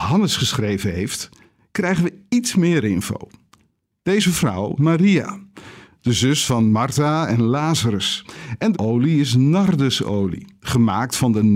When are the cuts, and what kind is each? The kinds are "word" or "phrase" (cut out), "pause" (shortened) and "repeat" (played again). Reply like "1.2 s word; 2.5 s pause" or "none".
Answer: 4.8 s word; 8.7 s phrase